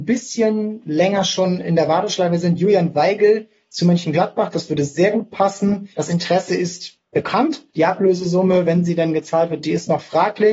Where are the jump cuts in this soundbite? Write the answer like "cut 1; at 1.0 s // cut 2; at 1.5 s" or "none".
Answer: cut 1; at 5.9 s // cut 2; at 7.7 s